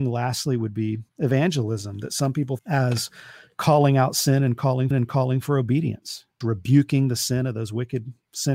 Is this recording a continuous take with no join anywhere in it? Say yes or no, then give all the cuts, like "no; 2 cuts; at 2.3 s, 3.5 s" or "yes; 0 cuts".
no; 4 cuts; at 1.1 s, 2.6 s, 4.9 s, 6.4 s